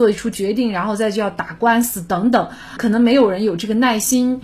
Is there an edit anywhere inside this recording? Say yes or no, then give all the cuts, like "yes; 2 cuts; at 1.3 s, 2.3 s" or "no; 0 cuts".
yes; 1 cut; at 2.8 s